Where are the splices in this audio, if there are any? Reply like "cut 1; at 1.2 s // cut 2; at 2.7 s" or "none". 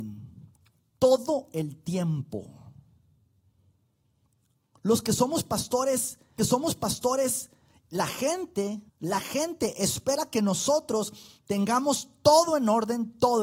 cut 1; at 6.4 s // cut 2; at 8.9 s